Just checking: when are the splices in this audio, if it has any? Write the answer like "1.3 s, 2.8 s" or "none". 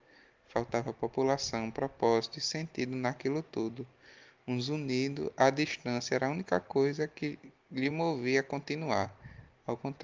none